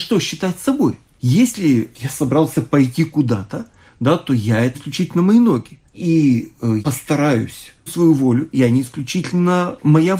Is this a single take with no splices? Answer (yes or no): no